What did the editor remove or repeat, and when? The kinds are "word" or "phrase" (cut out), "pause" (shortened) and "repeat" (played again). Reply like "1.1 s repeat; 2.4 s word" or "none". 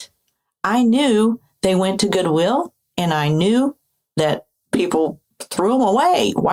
none